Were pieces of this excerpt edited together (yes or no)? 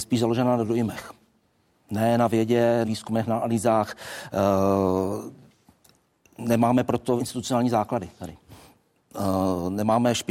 yes